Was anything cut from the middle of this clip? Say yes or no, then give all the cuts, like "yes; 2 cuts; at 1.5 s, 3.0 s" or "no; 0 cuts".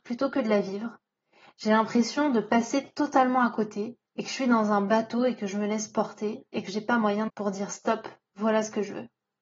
yes; 2 cuts; at 4.1 s, 7.3 s